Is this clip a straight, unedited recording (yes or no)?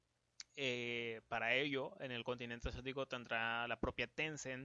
yes